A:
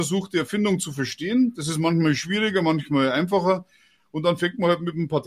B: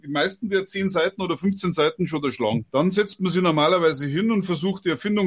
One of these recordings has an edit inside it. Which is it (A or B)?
B